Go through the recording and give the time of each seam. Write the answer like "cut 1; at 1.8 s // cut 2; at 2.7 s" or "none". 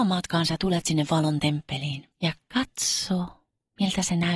cut 1; at 2.1 s